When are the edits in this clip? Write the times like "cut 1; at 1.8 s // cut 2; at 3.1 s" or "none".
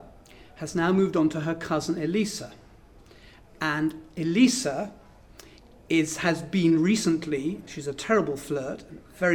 none